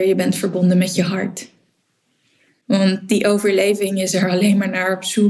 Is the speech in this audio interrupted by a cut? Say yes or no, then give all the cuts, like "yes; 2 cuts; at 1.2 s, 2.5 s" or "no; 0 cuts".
no; 0 cuts